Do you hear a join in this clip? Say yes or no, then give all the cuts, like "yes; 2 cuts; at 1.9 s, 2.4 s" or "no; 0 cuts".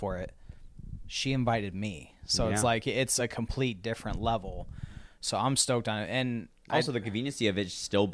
no; 0 cuts